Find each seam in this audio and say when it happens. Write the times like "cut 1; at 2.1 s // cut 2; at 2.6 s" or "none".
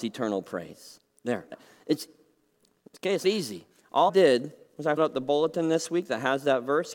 cut 1; at 1.5 s // cut 2; at 3.2 s // cut 3; at 4.1 s // cut 4; at 5.0 s

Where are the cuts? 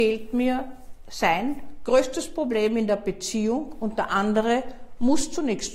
none

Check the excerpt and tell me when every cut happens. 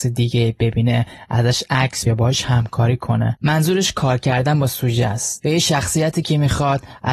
cut 1; at 2.1 s

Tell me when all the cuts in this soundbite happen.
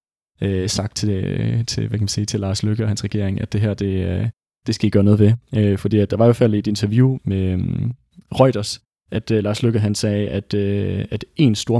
cut 1; at 7.2 s

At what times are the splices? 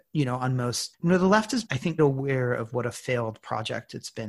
cut 1; at 0.9 s // cut 2; at 1.7 s // cut 3; at 2.0 s

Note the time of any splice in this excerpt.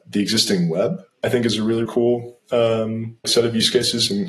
cut 1; at 1.9 s // cut 2; at 3.2 s

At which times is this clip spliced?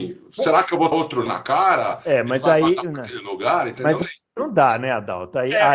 cut 1; at 0.9 s // cut 2; at 1.3 s // cut 3; at 4.0 s

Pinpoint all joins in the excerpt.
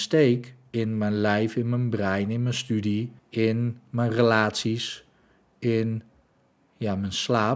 cut 1; at 3.2 s

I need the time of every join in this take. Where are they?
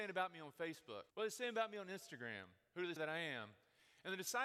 cut 1; at 1.1 s // cut 2; at 3.0 s

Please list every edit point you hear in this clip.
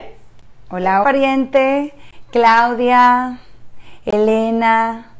cut 1; at 1.0 s

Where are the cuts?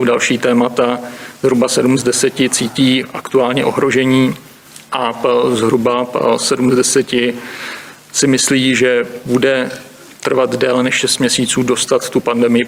none

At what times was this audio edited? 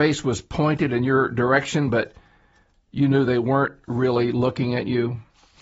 none

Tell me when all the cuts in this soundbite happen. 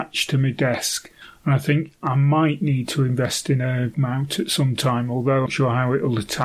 cut 1; at 3.9 s // cut 2; at 5.5 s

